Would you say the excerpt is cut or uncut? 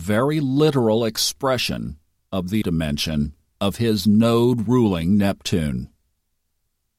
cut